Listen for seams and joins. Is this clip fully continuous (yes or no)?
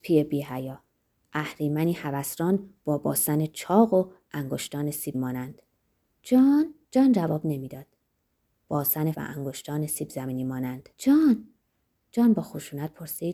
no